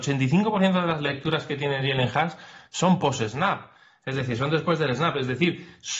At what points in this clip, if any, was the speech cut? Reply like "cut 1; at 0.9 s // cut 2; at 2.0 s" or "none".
none